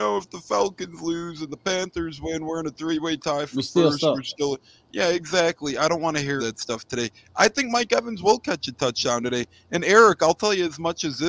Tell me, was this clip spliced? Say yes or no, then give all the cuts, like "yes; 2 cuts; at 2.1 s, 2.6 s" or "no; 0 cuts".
yes; 1 cut; at 6.4 s